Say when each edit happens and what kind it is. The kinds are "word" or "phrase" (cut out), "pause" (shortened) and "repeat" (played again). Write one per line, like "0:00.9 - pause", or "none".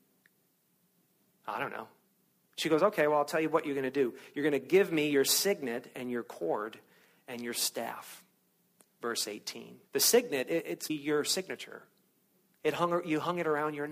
0:09.8 - pause
0:10.9 - word